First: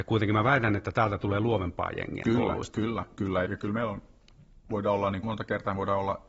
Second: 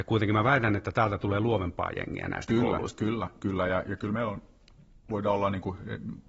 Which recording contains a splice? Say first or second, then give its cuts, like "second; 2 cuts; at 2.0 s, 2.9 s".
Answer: first; 3 cuts; at 2.2 s, 3.4 s, 5.2 s